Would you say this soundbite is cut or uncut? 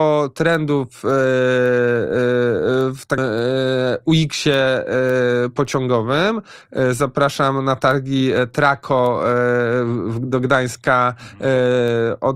cut